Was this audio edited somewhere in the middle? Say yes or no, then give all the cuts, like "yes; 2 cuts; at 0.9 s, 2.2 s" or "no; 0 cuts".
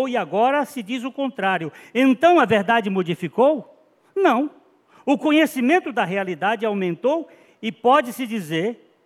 no; 0 cuts